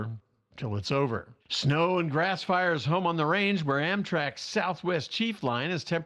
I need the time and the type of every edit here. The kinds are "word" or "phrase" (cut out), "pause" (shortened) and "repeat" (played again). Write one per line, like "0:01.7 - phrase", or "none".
0:01.4 - pause